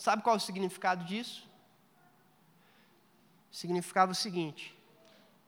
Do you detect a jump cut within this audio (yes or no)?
no